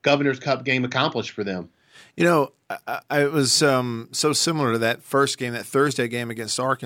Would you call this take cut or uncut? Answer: uncut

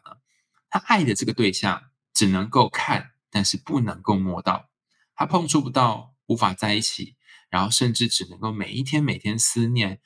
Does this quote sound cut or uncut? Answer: uncut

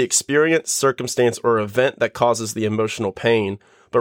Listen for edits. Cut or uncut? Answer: uncut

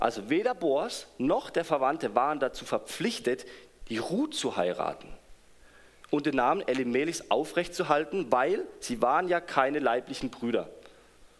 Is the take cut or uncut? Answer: uncut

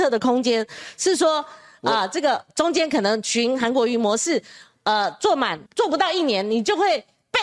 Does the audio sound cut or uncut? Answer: cut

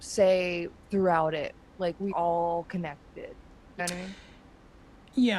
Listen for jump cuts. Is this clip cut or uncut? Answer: cut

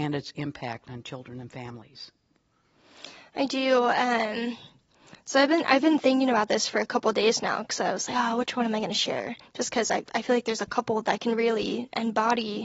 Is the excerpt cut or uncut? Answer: uncut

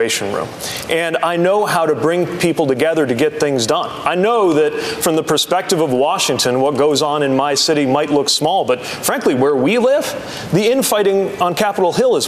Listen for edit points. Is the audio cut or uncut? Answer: uncut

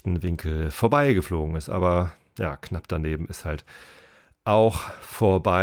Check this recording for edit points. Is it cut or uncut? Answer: uncut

